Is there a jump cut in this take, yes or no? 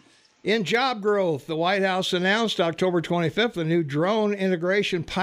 no